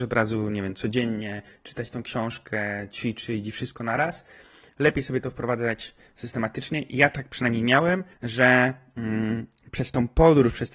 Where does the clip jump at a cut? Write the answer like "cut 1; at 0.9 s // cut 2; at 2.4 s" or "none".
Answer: cut 1; at 8.1 s